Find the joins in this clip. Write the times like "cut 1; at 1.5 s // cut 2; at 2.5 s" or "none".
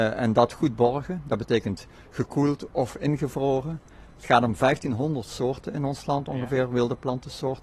none